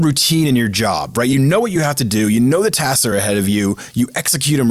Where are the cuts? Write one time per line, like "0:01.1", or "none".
none